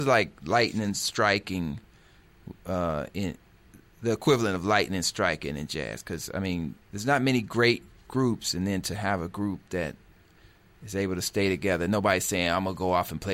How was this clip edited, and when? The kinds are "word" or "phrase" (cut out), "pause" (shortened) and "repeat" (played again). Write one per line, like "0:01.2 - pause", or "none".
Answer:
0:06.8 - pause